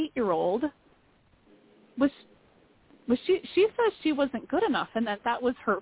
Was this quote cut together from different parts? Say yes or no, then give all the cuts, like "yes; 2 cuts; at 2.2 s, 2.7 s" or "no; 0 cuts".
no; 0 cuts